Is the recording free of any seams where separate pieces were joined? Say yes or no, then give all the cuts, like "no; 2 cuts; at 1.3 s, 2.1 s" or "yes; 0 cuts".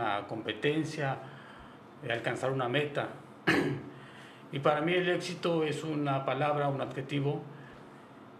yes; 0 cuts